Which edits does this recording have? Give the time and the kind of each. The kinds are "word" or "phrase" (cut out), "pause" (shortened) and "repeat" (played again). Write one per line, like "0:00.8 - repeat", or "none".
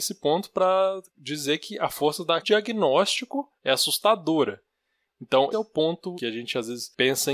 0:01.1 - pause
0:02.4 - phrase
0:03.6 - pause
0:05.5 - word
0:06.2 - word

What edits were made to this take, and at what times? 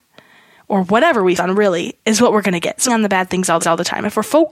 0:01.4 - word
0:02.9 - phrase
0:03.6 - repeat

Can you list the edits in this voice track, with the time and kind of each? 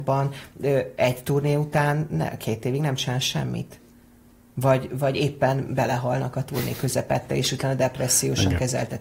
none

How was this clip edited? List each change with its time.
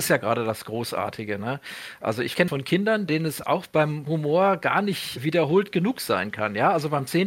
0:02.5 - word

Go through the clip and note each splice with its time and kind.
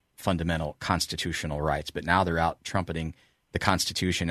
none

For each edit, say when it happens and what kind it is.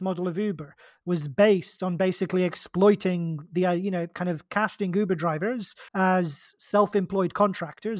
0:05.9 - pause

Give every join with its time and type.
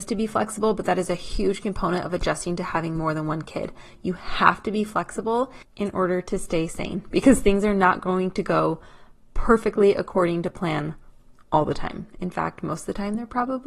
0:05.7 - pause

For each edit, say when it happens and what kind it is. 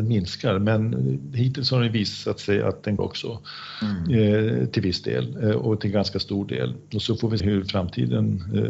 0:03.0 - word
0:07.4 - word

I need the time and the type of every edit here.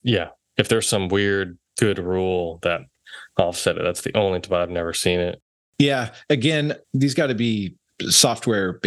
0:06.8 - word

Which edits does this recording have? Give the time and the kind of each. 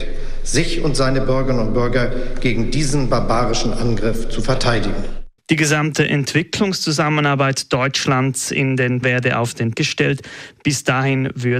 0:05.4 - pause
0:09.0 - phrase
0:09.7 - word

